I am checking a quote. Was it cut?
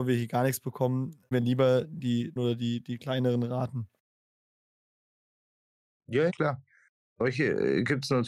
yes; 3 cuts; at 1.3 s, 2.4 s, 6.3 s

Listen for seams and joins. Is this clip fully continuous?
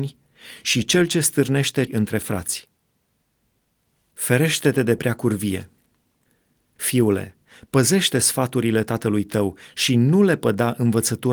no; 1 cut; at 1.9 s

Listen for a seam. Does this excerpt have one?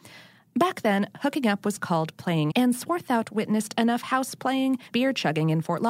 yes; 2 cuts; at 2.5 s, 4.9 s

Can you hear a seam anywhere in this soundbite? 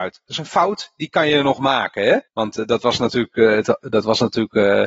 yes; 1 cut; at 2.3 s

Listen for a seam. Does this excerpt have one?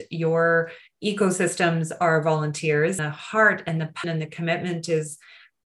yes; 2 cuts; at 3.0 s, 4.0 s

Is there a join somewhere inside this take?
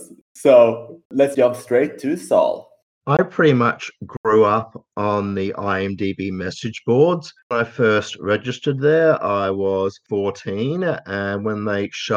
yes; 1 cut; at 1.3 s

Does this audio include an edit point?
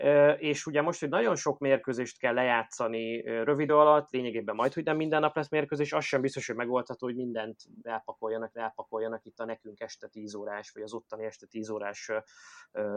yes; 2 cuts; at 3.7 s, 8.5 s

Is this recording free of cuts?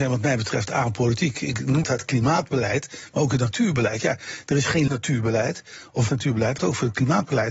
no; 4 cuts; at 1.8 s, 4.9 s, 6.1 s, 6.6 s

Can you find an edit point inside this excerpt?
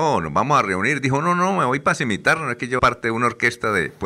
yes; 1 cut; at 2.8 s

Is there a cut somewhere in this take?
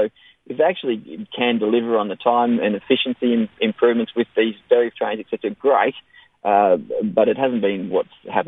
yes; 1 cut; at 4.9 s

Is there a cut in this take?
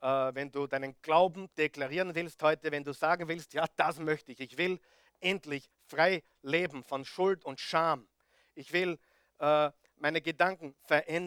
no; 0 cuts

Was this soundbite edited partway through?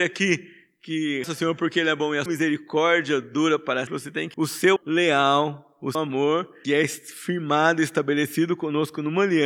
yes; 7 cuts; at 1.2 s, 2.3 s, 3.9 s, 4.3 s, 4.8 s, 5.9 s, 6.6 s

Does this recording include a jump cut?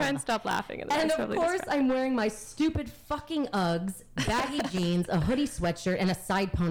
no; 0 cuts

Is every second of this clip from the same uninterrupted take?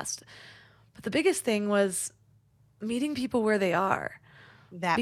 yes; 0 cuts

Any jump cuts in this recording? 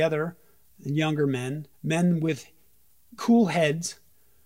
yes; 2 cuts; at 1.7 s, 3.2 s

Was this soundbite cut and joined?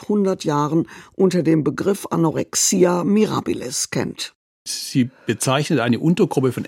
no; 0 cuts

